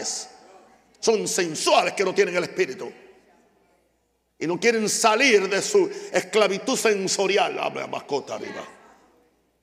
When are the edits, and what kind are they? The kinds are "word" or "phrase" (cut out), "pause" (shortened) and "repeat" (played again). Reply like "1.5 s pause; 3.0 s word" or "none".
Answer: none